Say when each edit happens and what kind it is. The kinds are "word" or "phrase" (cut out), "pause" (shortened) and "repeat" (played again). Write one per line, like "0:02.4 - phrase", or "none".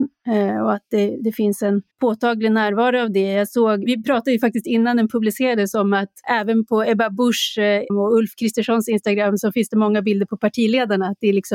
0:01.9 - pause
0:03.9 - word
0:06.2 - word
0:07.9 - word